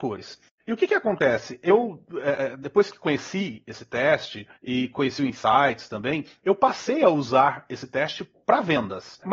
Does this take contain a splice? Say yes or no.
yes